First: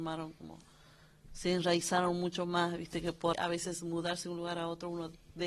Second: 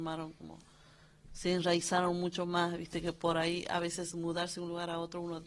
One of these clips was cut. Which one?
first; 1 cut; at 3.3 s

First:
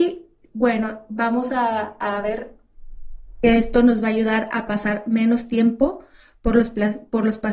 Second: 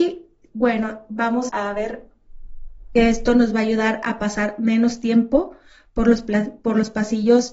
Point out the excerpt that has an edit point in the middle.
second; 1 cut; at 1.5 s

